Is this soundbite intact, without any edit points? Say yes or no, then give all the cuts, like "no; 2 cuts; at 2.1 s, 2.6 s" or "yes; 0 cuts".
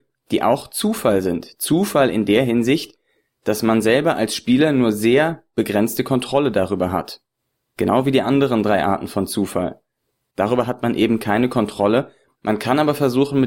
yes; 0 cuts